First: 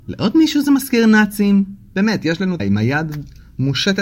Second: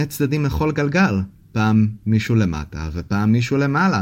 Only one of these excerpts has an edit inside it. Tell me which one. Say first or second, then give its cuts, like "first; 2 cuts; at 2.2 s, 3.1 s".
first; 1 cut; at 2.6 s